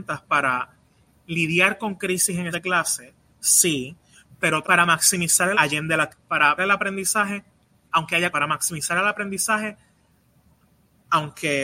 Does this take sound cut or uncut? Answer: cut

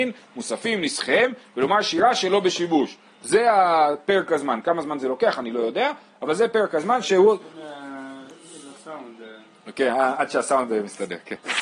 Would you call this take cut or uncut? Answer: uncut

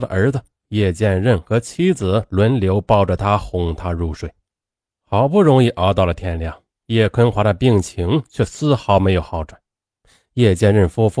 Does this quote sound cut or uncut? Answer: uncut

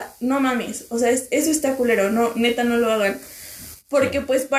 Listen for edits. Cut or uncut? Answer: uncut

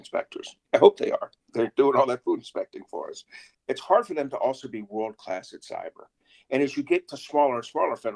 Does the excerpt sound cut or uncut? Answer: uncut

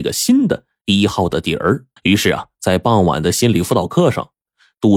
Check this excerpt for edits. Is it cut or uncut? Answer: cut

